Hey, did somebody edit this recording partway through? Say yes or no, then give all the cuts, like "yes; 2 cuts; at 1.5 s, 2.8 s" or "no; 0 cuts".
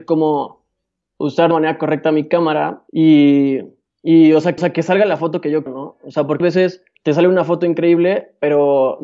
yes; 6 cuts; at 1.5 s, 2.9 s, 4.6 s, 5.7 s, 6.4 s, 6.9 s